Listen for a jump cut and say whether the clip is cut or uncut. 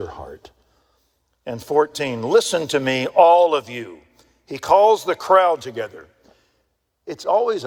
uncut